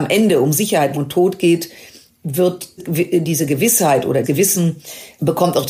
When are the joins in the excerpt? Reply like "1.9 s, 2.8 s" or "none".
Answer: 0.9 s, 2.8 s, 4.2 s